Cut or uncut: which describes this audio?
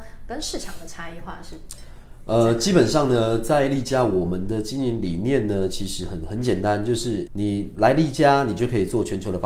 cut